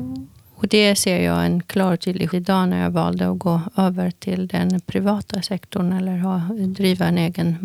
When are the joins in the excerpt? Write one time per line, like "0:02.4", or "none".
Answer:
0:02.3